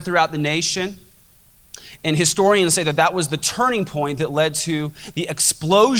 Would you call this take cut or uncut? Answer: uncut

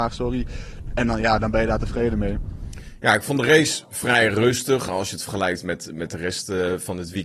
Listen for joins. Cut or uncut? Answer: uncut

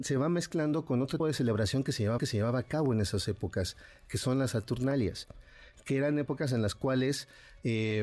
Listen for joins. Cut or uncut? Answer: cut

